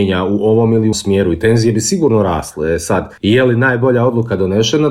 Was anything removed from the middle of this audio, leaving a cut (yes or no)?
yes